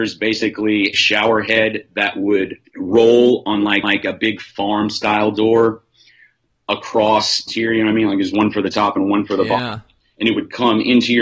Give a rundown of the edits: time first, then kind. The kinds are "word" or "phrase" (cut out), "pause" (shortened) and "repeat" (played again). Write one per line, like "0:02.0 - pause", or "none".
0:00.9 - word
0:02.7 - pause
0:03.8 - repeat
0:07.5 - phrase